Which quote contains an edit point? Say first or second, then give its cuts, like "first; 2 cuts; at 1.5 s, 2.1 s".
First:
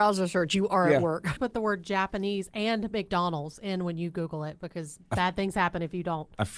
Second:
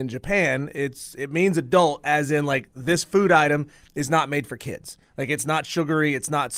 first; 1 cut; at 1.4 s